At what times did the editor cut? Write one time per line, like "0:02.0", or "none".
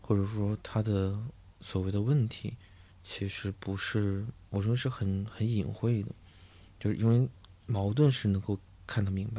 0:02.9